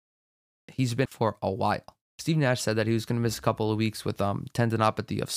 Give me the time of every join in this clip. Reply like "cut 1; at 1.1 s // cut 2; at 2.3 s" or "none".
cut 1; at 1.1 s // cut 2; at 2.1 s